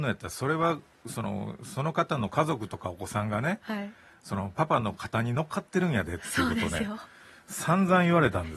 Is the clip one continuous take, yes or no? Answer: yes